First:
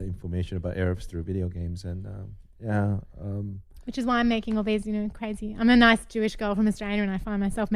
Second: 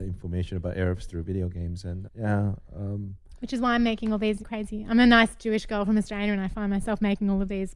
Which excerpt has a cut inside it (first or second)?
second